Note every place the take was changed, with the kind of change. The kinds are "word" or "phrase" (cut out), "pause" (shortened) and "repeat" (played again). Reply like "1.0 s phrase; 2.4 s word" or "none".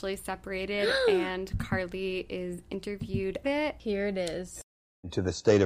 3.4 s word